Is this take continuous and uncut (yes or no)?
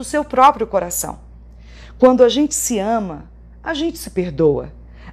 yes